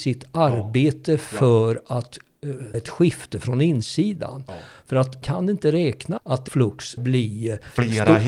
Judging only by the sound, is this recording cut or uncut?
cut